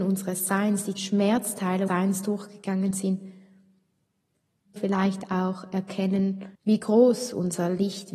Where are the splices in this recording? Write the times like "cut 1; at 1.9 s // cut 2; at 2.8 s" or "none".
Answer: cut 1; at 1.0 s // cut 2; at 1.9 s // cut 3; at 4.8 s // cut 4; at 6.5 s